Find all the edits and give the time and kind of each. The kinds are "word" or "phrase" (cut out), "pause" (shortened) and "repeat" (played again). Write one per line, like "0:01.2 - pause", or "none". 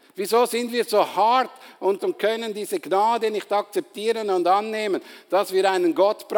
0:02.0 - phrase

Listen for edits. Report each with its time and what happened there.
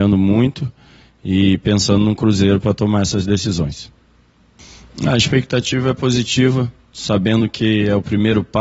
none

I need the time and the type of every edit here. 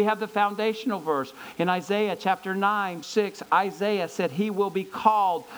0:03.0 - word

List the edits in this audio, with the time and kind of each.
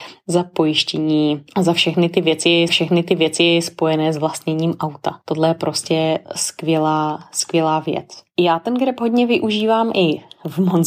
0:02.7 - repeat

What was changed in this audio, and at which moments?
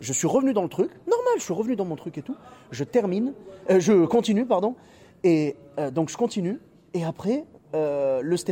none

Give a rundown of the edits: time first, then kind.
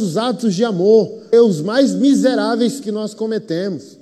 0:01.3 - phrase
0:02.8 - word

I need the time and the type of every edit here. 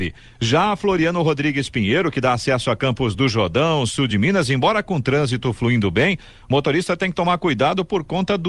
none

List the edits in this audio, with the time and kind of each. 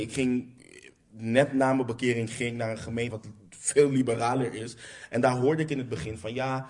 0:03.1 - word

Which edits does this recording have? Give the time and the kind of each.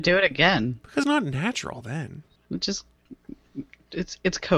0:01.0 - word

